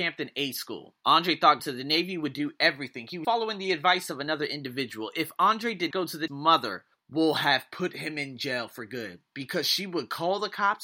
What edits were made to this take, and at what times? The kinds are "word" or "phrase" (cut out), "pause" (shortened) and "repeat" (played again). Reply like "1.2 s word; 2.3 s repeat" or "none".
1.0 s pause; 1.6 s word; 3.2 s word; 5.9 s word; 6.3 s phrase; 6.9 s pause